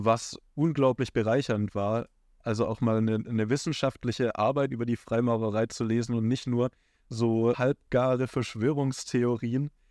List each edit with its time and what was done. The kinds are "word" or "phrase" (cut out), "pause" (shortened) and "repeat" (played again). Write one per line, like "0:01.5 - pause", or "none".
0:07.5 - word